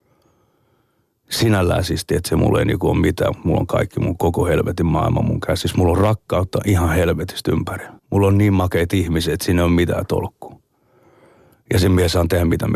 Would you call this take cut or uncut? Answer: cut